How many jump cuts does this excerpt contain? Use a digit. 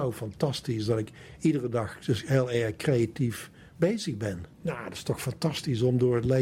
1